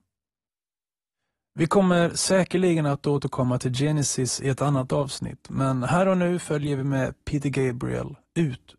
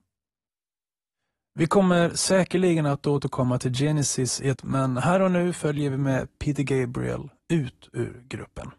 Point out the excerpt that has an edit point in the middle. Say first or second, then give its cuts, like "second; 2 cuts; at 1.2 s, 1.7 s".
second; 1 cut; at 4.6 s